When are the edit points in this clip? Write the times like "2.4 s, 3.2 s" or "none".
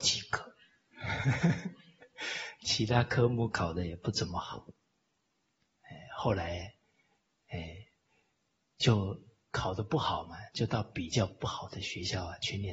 none